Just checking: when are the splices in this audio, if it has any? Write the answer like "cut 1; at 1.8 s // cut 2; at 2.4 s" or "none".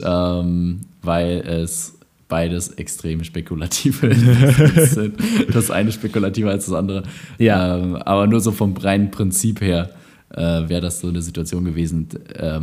none